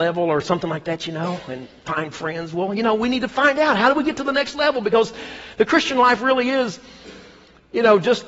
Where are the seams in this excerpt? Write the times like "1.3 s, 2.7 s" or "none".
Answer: none

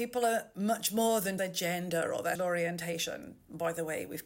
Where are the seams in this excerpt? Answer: 1.4 s, 2.4 s

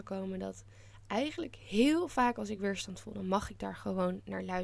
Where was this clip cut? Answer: none

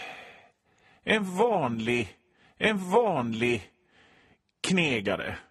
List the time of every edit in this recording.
2.4 s

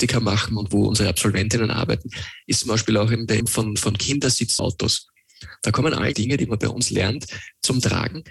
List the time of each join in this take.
3.4 s, 4.6 s, 6.1 s

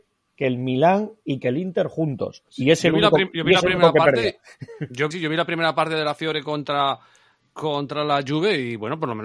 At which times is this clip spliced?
2.5 s, 5.1 s

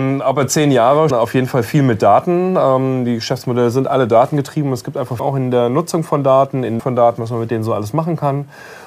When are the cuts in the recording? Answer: 1.1 s, 5.2 s, 6.8 s

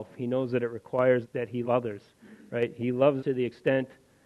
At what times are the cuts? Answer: 1.2 s, 1.6 s, 3.2 s

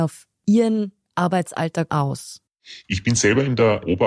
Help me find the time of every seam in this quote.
1.9 s

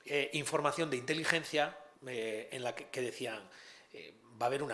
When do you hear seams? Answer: 2.0 s

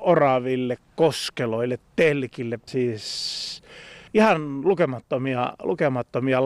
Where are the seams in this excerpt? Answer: 2.7 s, 4.1 s

